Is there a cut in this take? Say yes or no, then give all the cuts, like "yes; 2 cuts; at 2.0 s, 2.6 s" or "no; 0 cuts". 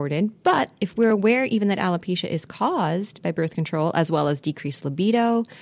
no; 0 cuts